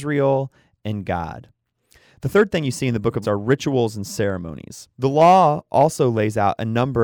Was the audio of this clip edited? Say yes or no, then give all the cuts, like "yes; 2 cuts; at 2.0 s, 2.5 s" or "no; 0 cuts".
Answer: yes; 2 cuts; at 3.2 s, 4.9 s